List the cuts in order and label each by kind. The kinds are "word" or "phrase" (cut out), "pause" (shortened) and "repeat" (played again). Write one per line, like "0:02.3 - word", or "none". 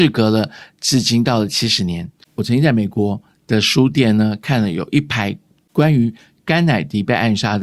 none